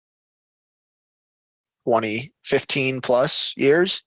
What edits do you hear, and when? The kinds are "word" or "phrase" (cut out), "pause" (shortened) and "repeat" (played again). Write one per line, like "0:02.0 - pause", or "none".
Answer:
none